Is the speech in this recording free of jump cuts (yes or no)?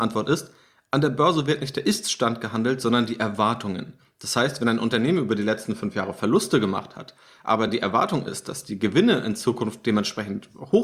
yes